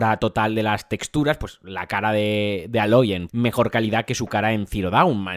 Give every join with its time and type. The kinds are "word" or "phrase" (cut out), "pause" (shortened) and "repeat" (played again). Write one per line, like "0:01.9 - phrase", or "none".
0:03.3 - phrase